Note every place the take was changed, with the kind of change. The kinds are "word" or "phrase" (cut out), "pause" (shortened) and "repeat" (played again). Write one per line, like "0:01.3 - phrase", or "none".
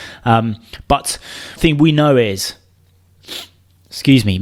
0:01.6 - word